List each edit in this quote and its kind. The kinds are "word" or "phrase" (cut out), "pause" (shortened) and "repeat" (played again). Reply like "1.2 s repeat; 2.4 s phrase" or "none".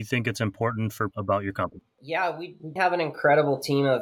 1.1 s phrase; 2.8 s word